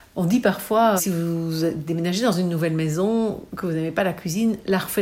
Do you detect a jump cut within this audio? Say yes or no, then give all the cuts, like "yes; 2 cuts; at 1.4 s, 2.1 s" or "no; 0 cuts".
yes; 1 cut; at 1.0 s